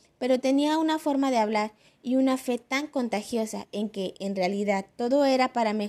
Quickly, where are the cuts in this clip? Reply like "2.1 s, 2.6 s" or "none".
none